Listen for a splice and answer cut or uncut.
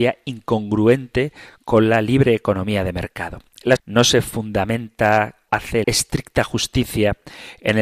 cut